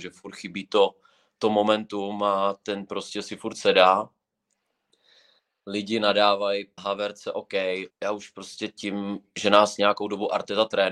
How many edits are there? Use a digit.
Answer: 3